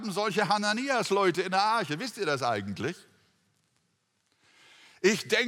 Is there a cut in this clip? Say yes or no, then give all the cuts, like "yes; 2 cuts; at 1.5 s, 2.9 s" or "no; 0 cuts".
no; 0 cuts